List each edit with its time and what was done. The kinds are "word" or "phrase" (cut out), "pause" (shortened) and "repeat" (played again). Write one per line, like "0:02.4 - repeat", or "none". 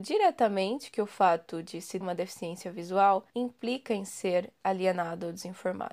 0:02.0 - word
0:03.3 - pause